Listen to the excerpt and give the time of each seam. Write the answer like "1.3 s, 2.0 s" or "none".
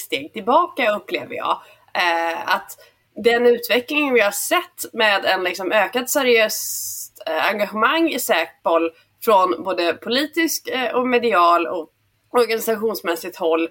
none